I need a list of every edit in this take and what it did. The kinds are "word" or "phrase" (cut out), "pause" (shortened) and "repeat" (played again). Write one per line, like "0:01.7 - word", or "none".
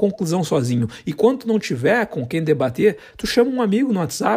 none